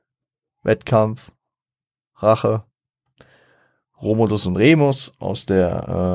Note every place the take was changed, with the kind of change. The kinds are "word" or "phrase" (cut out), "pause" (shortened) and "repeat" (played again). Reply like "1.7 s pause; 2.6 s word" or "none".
none